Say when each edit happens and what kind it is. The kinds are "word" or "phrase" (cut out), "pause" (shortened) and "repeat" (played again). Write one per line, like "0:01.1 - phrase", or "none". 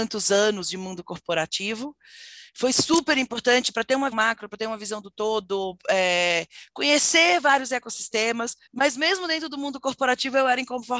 0:04.1 - word
0:08.7 - pause